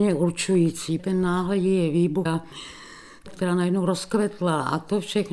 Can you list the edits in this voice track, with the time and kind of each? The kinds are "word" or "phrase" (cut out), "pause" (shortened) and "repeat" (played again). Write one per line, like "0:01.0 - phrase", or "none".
0:01.0 - word
0:02.3 - word
0:03.3 - word